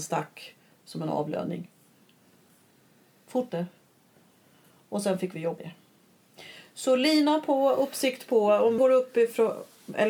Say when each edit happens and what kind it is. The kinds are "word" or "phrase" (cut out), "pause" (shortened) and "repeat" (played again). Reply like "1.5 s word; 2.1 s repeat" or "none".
3.5 s word; 5.6 s word; 8.8 s word